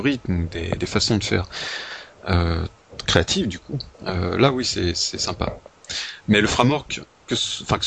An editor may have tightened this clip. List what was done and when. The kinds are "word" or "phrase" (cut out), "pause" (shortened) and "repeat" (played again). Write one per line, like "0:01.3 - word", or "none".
0:03.9 - pause